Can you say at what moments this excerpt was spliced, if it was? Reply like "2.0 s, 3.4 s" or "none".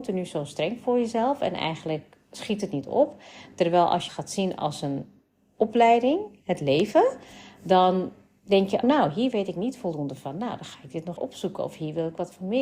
4.1 s, 8.8 s, 11.2 s